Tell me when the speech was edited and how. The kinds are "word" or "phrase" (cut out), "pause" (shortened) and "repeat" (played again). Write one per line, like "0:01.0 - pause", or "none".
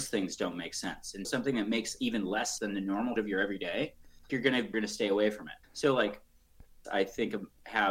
0:01.2 - word
0:02.6 - word
0:03.2 - word
0:04.3 - word
0:04.7 - word
0:05.6 - pause
0:06.8 - phrase